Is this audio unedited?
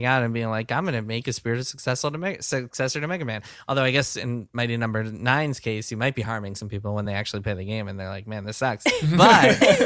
yes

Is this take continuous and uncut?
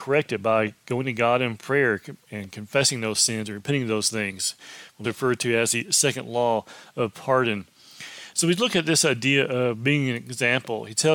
no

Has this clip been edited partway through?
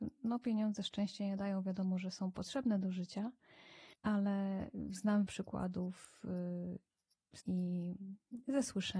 yes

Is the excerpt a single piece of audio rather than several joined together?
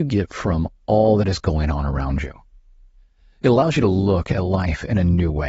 yes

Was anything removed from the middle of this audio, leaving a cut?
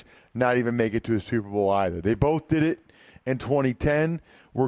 no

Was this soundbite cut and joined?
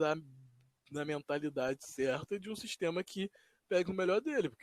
no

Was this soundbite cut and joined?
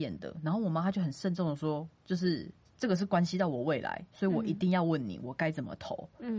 yes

